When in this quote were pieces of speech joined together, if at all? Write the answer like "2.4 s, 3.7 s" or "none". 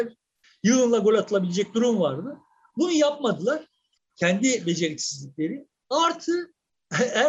none